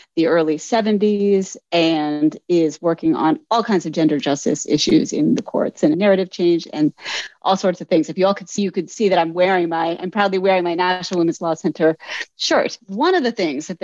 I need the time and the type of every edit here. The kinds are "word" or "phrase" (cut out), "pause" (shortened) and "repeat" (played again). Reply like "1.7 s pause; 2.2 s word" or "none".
5.9 s phrase; 8.6 s word